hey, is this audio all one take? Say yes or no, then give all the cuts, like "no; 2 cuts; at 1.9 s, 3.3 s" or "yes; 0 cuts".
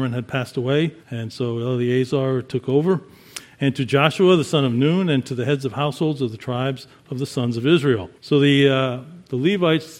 no; 2 cuts; at 1.0 s, 8.2 s